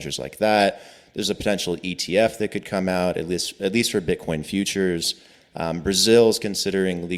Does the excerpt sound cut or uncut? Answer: uncut